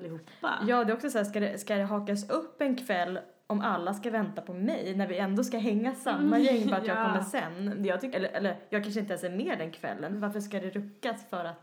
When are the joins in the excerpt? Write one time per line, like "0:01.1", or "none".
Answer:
0:08.1